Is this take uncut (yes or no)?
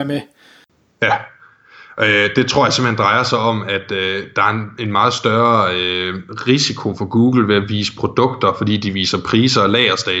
yes